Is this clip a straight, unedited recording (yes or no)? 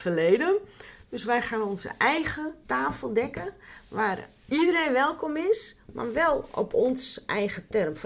yes